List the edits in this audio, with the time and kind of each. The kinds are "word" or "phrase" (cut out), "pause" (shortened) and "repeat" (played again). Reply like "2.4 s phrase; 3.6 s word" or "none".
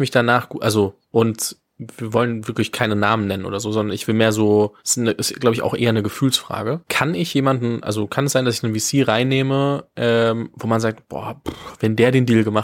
4.8 s pause